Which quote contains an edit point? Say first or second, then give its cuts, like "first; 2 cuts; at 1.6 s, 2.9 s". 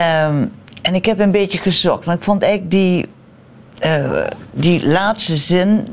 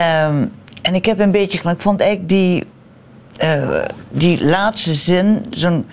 second; 1 cut; at 1.6 s